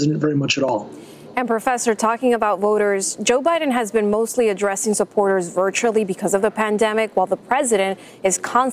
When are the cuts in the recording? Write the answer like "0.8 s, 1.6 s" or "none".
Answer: none